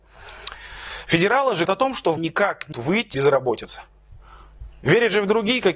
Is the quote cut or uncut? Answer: cut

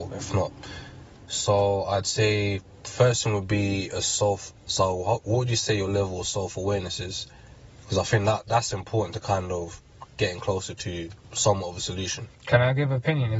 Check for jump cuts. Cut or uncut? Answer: cut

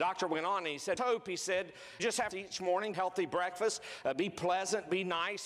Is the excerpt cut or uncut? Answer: cut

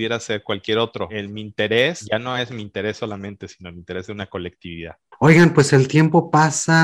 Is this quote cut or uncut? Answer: uncut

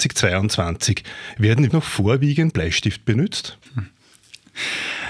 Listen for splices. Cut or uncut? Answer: cut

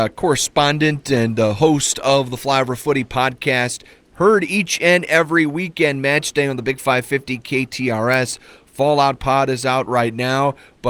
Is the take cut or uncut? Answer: uncut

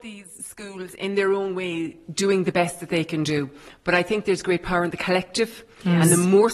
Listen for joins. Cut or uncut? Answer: uncut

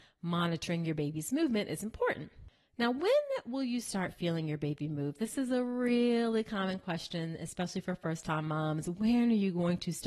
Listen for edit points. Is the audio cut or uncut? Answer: uncut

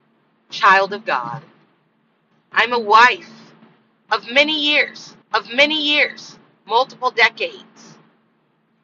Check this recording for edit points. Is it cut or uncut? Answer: cut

